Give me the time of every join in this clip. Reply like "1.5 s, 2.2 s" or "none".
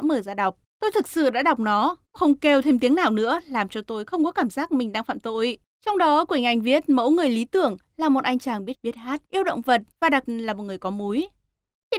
2.2 s, 8.7 s, 9.3 s, 9.9 s, 10.3 s